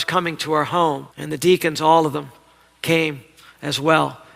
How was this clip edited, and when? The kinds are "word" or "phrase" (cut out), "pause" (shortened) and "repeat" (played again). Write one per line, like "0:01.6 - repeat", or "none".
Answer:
0:01.1 - pause